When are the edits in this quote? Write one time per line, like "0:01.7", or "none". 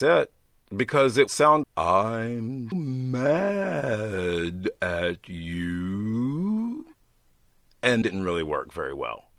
0:01.3
0:01.6
0:02.7
0:08.0